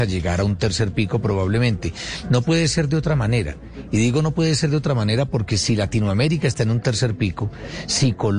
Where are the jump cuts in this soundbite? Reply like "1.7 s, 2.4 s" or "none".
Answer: none